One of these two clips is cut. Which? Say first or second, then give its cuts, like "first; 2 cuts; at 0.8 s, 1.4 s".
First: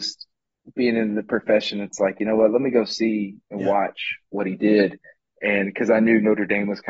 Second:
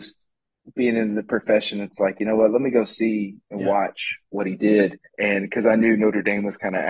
second; 1 cut; at 5.1 s